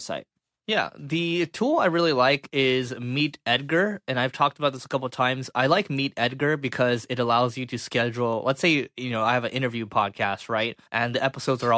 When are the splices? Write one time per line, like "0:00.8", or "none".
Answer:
0:10.9